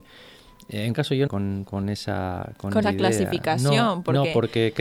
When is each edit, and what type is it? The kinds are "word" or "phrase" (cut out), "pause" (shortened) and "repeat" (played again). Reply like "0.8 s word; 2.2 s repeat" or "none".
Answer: 0.9 s word; 1.3 s phrase; 2.8 s word